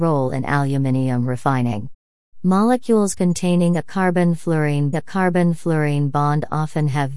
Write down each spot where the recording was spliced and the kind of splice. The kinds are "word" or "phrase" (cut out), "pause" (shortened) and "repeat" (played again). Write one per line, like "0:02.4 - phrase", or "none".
0:04.9 - repeat